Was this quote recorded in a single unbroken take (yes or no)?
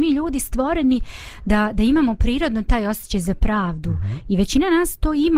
yes